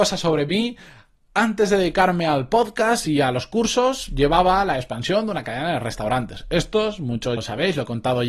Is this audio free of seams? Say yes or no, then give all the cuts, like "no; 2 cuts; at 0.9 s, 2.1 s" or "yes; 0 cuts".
no; 1 cut; at 7.4 s